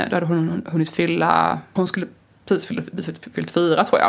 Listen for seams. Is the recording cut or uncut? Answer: cut